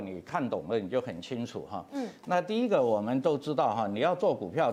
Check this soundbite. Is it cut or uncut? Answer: uncut